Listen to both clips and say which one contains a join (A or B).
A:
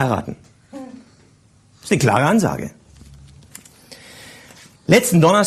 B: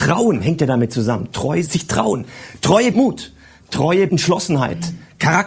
B